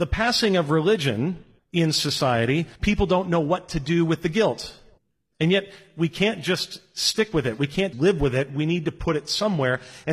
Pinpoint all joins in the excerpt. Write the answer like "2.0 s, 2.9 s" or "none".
1.6 s, 2.7 s, 5.0 s, 7.9 s